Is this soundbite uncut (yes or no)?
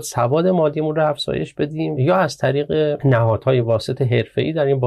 yes